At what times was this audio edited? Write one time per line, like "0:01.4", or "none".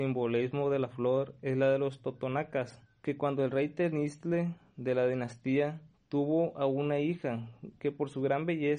0:02.9
0:05.9